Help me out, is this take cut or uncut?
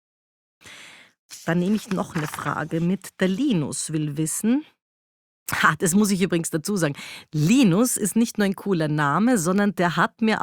uncut